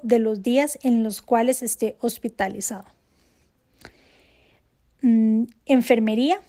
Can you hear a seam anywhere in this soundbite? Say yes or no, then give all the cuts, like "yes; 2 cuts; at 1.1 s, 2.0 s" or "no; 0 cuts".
no; 0 cuts